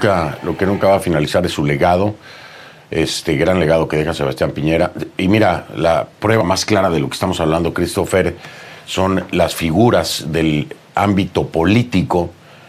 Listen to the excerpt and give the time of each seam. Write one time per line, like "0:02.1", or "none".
0:06.1

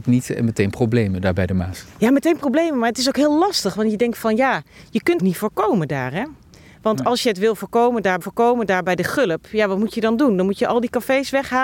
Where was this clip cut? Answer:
0:05.2
0:08.2

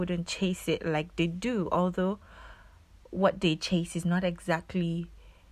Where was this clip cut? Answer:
none

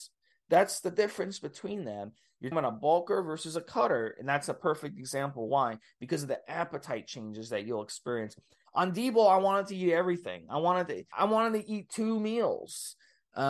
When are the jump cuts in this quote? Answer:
0:02.5
0:11.1

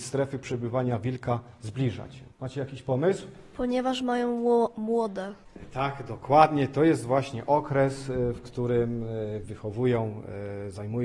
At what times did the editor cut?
0:09.4

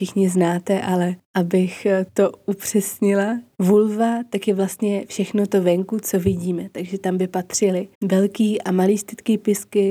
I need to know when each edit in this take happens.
0:02.1
0:03.5
0:07.9

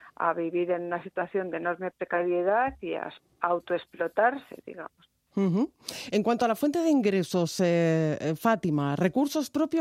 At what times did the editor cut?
none

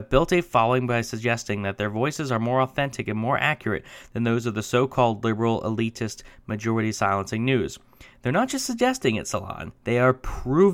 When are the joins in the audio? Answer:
0:09.8

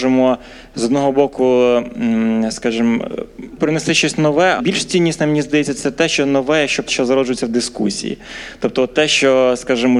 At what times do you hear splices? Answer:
0:03.6
0:04.6
0:06.9

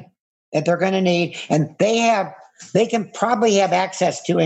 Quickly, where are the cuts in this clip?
none

